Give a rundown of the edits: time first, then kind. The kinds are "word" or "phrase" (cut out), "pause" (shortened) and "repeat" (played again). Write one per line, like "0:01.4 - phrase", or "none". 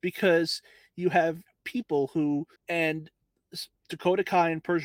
0:02.6 - pause